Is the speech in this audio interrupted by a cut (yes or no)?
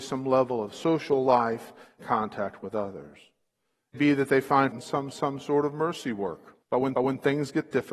yes